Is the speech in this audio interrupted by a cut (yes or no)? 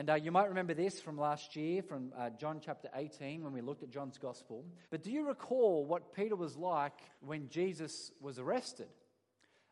yes